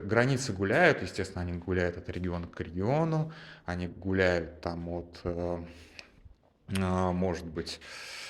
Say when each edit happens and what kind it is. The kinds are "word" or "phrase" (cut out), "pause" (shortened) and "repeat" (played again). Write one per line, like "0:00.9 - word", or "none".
none